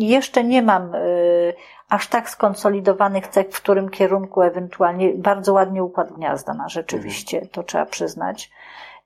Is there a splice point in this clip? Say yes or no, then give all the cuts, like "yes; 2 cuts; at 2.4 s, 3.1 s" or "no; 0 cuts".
no; 0 cuts